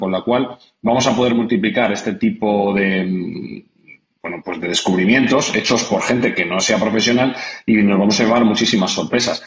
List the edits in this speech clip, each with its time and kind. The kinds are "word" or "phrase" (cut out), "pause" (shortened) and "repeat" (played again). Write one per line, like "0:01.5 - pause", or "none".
none